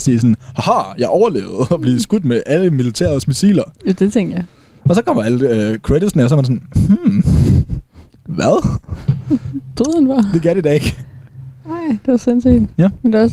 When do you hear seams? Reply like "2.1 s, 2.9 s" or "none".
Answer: none